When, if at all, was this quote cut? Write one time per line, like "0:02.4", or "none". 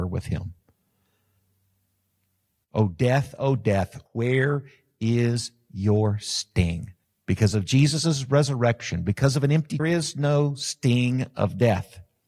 0:04.1
0:07.0
0:09.8